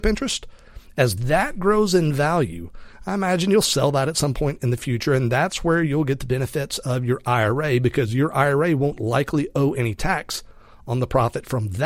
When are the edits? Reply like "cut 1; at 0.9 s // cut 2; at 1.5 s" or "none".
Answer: none